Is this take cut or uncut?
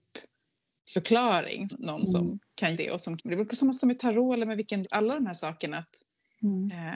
cut